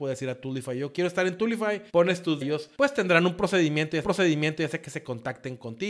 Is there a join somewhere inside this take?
yes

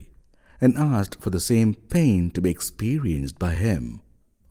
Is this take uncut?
yes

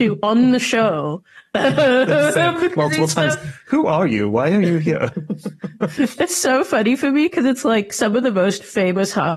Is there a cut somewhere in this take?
no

